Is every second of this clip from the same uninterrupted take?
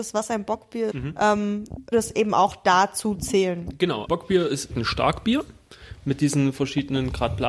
no; 4 cuts; at 0.9 s, 1.9 s, 4.1 s, 4.7 s

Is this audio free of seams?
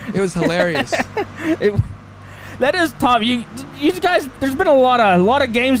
yes; 0 cuts

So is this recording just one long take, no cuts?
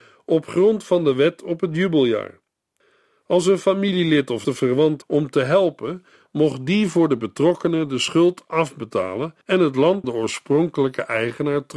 no; 4 cuts; at 4.4 s, 5.0 s, 9.4 s, 10.0 s

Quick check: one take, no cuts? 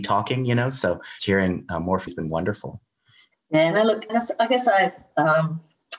no; 3 cuts; at 1.2 s, 2.1 s, 4.1 s

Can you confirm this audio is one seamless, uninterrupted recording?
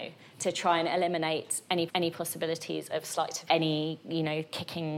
no; 2 cuts; at 1.9 s, 3.5 s

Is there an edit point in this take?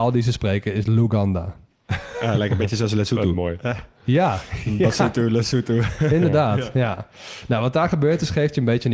no; 0 cuts

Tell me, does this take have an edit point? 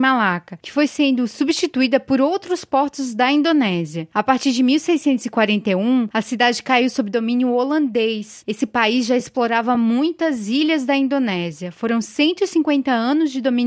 no; 0 cuts

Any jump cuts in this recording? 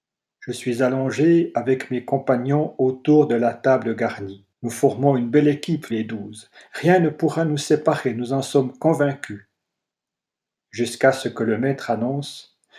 yes; 2 cuts; at 4.5 s, 5.9 s

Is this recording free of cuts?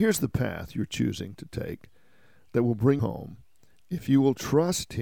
no; 1 cut; at 3.0 s

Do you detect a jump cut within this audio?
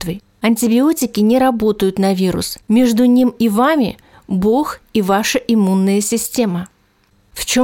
yes; 1 cut; at 2.6 s

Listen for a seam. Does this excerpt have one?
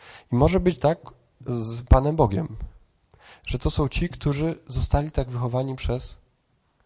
no; 0 cuts

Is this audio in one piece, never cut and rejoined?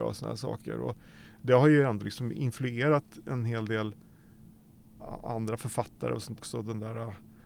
no; 1 cut; at 6.4 s

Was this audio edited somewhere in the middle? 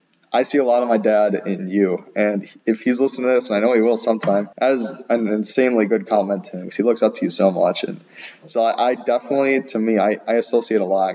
yes; 1 cut; at 4.5 s

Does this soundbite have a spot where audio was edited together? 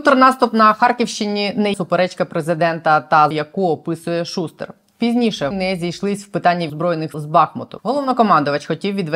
yes; 5 cuts; at 1.7 s, 3.3 s, 5.5 s, 6.7 s, 7.1 s

